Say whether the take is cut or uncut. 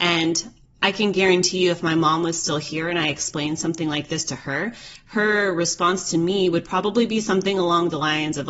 uncut